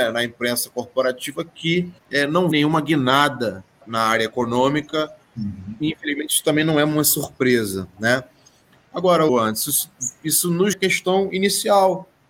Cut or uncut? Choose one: cut